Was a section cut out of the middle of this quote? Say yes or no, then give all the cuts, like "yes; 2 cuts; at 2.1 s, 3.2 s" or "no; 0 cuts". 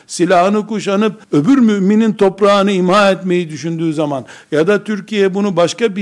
yes; 1 cut; at 1.2 s